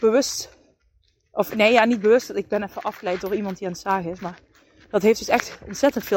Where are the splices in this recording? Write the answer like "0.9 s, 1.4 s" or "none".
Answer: none